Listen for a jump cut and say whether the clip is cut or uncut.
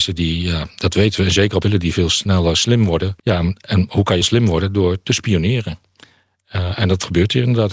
cut